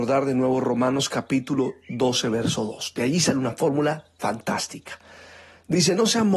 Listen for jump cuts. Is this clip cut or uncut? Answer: uncut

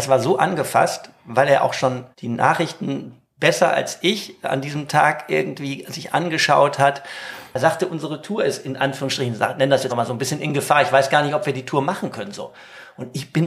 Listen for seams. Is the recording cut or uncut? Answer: cut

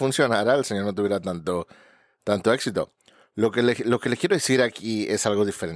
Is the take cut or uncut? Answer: uncut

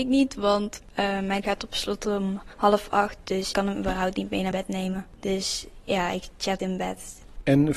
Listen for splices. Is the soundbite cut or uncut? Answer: cut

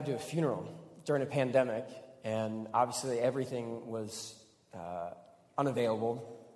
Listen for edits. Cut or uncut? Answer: uncut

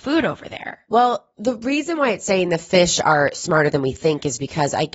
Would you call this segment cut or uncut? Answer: uncut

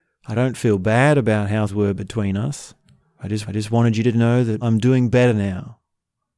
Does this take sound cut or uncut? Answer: cut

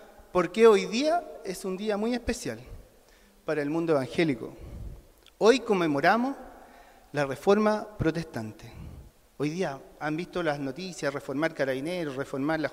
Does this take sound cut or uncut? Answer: uncut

